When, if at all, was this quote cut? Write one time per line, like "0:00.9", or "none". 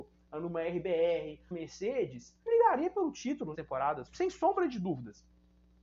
0:01.5
0:02.5
0:03.5
0:04.1

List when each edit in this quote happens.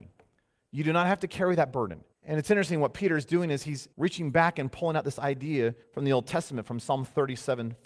0:02.1
0:03.9
0:05.8

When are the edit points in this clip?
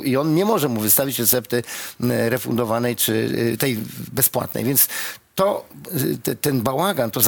none

